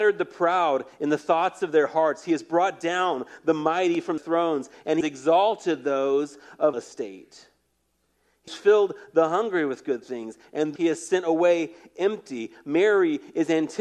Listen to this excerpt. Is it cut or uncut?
cut